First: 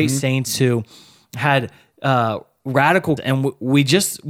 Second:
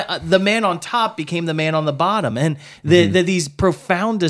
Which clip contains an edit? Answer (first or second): first